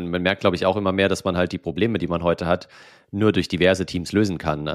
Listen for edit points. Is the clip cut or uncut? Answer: uncut